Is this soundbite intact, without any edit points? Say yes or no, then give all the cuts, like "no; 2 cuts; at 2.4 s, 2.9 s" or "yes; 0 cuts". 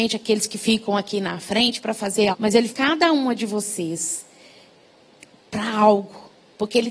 no; 2 cuts; at 2.3 s, 2.7 s